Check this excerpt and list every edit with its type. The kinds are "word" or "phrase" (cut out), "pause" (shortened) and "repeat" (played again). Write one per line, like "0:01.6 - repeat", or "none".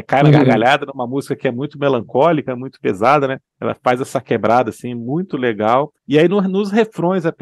0:03.5 - pause
0:06.0 - pause

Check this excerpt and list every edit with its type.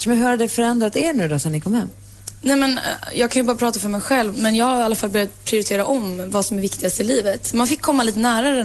0:04.3 - word

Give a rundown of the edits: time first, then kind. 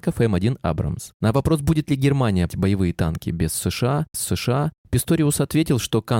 0:02.5 - word
0:04.1 - repeat

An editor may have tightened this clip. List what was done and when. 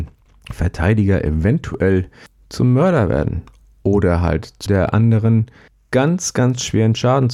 0:04.7 - word

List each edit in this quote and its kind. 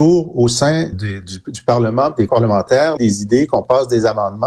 0:00.9 - word
0:02.3 - word
0:03.0 - phrase

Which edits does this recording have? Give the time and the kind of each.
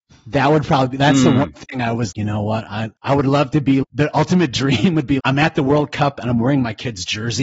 0:02.1 - word
0:03.0 - pause
0:03.8 - word
0:05.2 - word

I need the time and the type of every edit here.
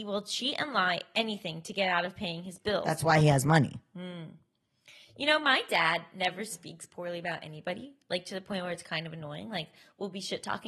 none

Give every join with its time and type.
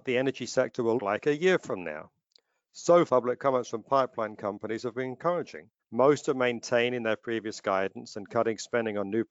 0:01.0 - word
0:03.1 - word
0:05.8 - pause

